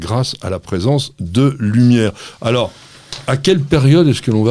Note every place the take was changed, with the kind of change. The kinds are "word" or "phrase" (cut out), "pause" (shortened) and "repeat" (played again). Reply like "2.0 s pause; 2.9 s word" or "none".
none